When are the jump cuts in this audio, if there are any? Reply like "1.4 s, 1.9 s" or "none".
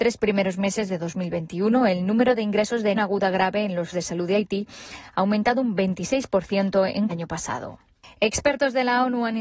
2.9 s, 3.9 s, 7.1 s

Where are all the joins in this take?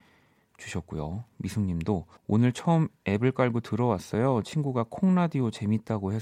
2.2 s

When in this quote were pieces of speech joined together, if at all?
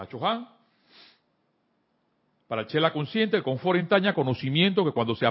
none

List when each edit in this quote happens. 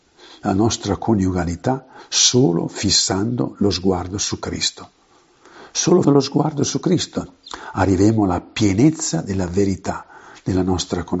6.0 s

